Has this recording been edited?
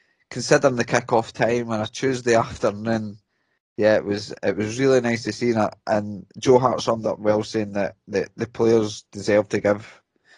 no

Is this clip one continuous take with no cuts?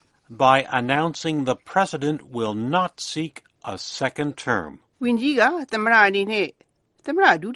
yes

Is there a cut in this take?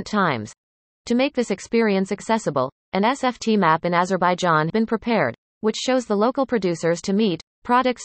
yes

